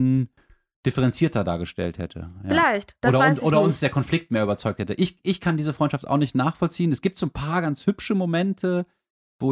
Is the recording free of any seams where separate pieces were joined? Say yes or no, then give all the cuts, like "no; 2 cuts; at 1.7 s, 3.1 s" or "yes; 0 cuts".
yes; 0 cuts